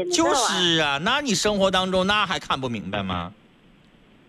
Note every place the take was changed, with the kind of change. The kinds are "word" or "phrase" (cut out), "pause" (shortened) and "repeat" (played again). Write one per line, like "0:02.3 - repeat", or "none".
none